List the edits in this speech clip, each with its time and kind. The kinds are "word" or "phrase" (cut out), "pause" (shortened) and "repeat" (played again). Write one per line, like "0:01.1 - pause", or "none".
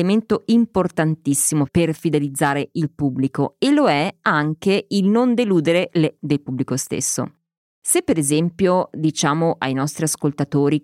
0:06.2 - word